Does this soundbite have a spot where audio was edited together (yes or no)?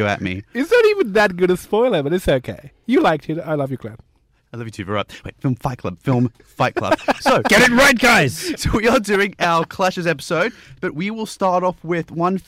no